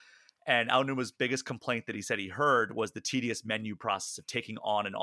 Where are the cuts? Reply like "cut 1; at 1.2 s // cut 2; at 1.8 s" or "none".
none